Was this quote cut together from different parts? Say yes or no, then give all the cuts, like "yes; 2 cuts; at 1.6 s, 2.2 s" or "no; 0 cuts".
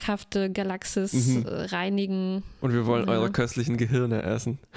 no; 0 cuts